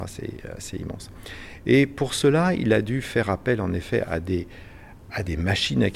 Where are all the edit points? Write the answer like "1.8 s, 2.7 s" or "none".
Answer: none